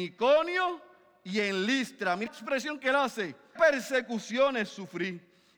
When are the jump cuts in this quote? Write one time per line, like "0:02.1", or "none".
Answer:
0:02.3
0:03.6

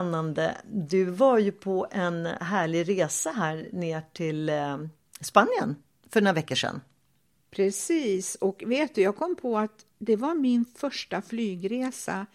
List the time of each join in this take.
0:09.9

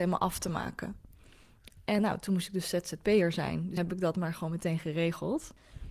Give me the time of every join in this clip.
0:02.0
0:03.8

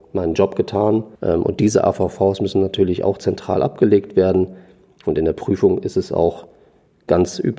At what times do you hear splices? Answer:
0:01.1

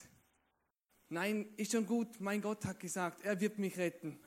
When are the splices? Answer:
none

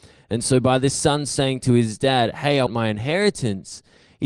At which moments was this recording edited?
0:02.7

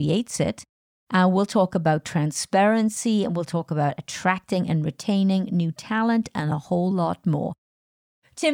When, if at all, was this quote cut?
none

